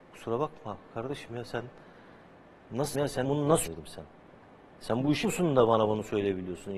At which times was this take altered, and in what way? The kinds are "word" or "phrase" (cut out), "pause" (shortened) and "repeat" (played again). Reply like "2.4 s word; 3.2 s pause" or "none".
1.3 s word; 2.9 s word; 3.2 s word; 3.7 s word; 5.2 s word